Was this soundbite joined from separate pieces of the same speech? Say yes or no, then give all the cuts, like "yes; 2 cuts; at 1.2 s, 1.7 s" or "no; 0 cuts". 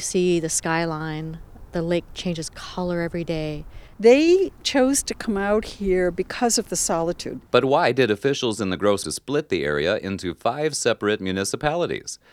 yes; 2 cuts; at 7.5 s, 9.0 s